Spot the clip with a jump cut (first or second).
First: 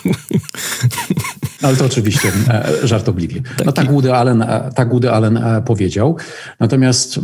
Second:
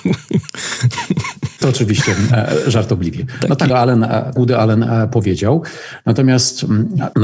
second